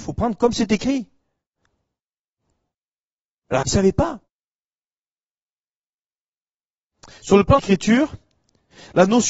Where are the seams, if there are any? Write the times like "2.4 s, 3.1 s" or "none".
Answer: 3.6 s, 7.6 s